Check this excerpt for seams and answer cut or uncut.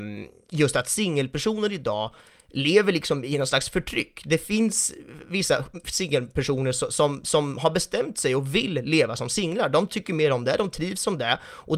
uncut